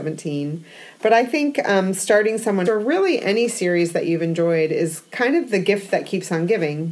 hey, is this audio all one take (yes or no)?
no